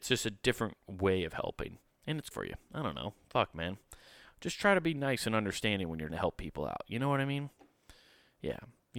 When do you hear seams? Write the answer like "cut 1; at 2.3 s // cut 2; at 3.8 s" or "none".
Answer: cut 1; at 2.3 s // cut 2; at 6.1 s